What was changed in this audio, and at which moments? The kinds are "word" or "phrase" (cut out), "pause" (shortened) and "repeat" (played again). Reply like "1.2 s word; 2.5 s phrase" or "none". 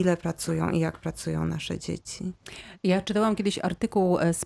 none